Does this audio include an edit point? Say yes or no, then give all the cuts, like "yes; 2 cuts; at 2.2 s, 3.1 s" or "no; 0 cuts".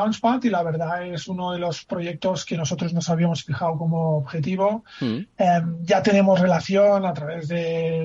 no; 0 cuts